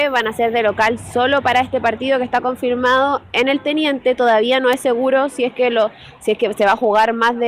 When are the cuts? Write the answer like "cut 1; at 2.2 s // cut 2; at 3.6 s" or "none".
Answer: none